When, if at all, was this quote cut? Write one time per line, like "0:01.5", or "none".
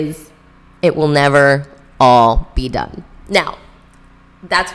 none